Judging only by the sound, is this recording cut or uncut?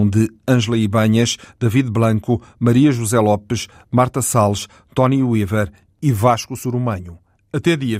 uncut